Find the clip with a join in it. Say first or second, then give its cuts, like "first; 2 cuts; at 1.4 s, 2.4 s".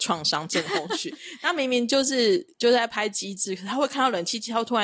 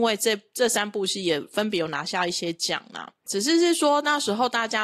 second; 1 cut; at 3.2 s